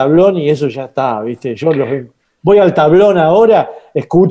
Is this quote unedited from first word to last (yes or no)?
yes